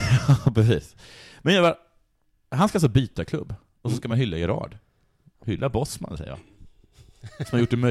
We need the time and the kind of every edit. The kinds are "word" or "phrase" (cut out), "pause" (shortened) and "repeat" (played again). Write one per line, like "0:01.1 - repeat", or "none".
none

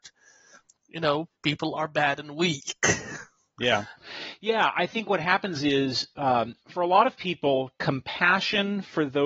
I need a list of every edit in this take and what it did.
0:06.6 - pause

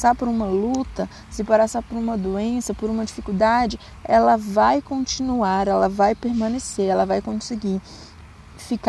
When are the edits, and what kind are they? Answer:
none

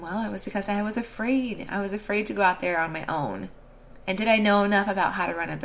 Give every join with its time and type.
0:04.0 - pause

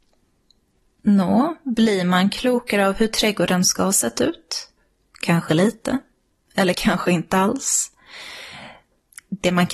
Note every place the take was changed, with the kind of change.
none

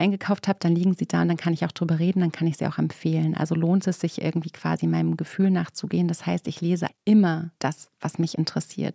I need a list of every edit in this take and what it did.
0:06.9 - word

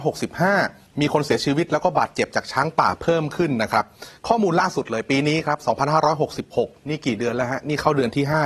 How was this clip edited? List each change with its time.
0:04.2 - pause

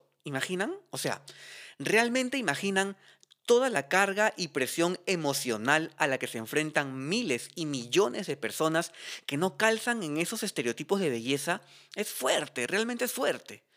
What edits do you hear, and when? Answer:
none

